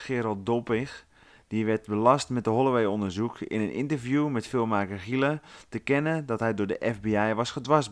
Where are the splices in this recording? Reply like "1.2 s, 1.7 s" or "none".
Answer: none